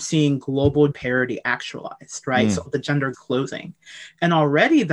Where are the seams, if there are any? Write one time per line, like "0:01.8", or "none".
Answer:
0:00.9
0:02.7
0:03.1